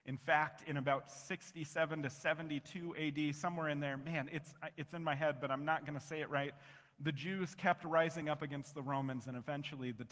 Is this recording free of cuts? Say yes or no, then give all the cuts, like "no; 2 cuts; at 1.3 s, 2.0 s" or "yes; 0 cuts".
yes; 0 cuts